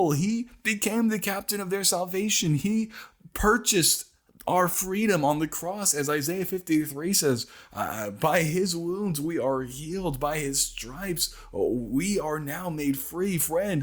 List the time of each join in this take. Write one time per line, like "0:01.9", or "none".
none